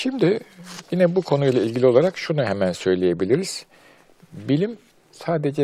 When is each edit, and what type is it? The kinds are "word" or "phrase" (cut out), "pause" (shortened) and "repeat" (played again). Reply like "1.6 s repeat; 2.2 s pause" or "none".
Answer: none